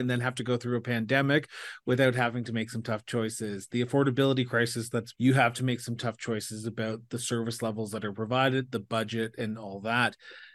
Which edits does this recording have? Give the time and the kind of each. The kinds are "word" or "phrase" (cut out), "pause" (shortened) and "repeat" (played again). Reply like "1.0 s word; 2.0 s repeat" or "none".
5.1 s phrase